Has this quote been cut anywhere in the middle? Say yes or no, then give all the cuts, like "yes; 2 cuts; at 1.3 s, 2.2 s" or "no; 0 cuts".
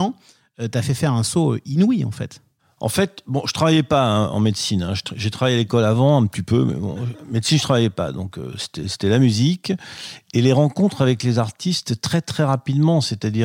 no; 0 cuts